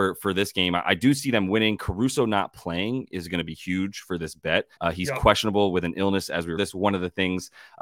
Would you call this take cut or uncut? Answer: cut